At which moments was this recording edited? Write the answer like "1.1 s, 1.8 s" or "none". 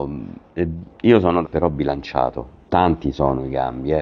1.4 s, 2.7 s